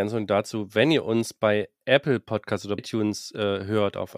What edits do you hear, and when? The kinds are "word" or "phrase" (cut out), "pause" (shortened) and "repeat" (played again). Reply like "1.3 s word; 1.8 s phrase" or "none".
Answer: 2.8 s word